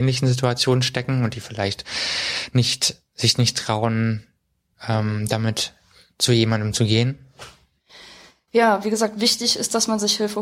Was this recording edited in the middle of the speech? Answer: no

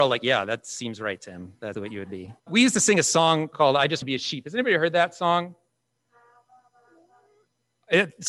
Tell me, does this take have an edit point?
yes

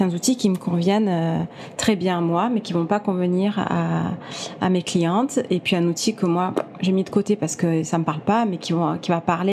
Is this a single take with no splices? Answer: yes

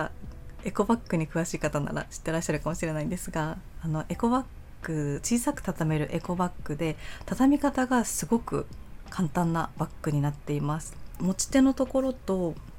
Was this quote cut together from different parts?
yes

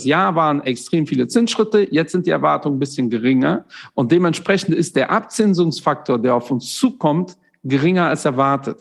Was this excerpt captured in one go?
yes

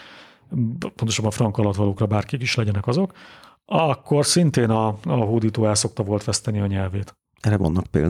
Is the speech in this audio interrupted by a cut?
no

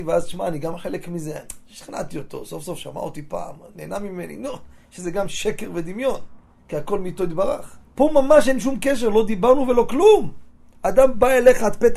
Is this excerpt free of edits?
no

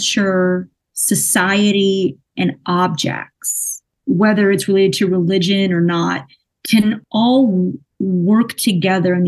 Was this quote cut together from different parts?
no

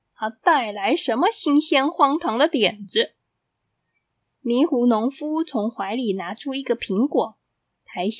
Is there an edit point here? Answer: no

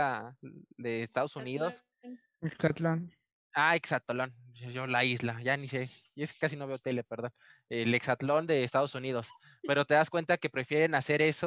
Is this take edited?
no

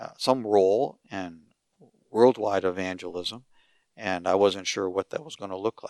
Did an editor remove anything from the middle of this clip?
no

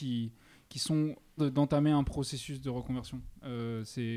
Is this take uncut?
no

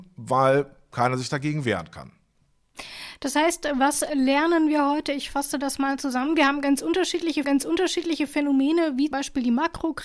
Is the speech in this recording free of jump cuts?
no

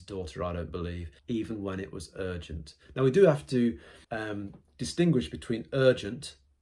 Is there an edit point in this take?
yes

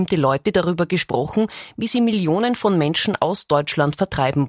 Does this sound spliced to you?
no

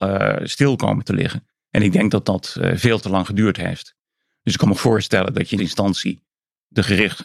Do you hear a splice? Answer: yes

